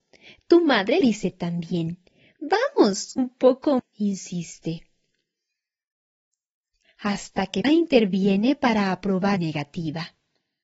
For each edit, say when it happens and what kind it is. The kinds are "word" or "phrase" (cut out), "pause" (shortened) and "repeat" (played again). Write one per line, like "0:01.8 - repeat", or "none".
0:01.0 - word
0:03.2 - word
0:03.8 - word
0:07.6 - word
0:09.4 - word